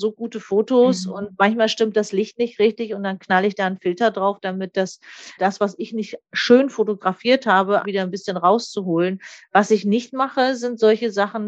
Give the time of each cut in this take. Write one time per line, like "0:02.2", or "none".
0:05.4
0:07.8

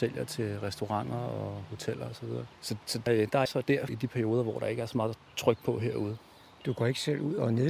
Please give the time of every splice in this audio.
0:02.6
0:03.1
0:03.5
0:03.9

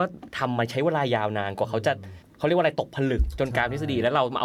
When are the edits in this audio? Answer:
0:02.2

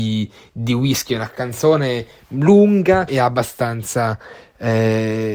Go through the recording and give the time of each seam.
0:03.1

